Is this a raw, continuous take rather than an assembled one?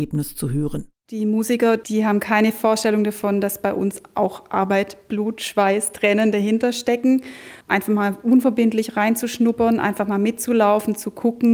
no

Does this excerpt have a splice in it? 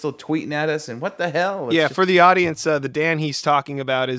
no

